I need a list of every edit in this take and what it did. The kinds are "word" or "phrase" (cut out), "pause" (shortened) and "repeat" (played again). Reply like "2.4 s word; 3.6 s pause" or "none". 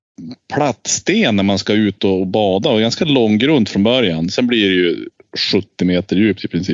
none